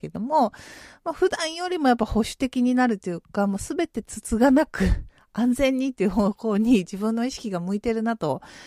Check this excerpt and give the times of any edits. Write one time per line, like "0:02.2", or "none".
none